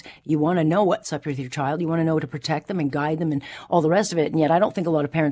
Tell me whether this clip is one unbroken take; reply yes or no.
yes